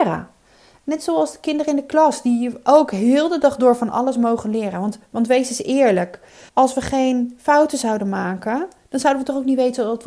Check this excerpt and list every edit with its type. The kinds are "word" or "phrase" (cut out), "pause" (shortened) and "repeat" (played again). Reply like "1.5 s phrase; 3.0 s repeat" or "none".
6.5 s pause